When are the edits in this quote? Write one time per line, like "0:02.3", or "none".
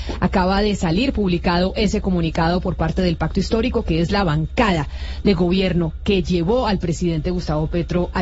none